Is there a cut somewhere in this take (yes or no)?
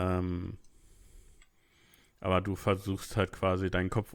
no